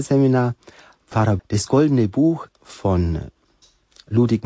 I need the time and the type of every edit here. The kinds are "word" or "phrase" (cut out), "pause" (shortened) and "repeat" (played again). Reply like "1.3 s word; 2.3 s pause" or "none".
1.4 s word; 2.6 s word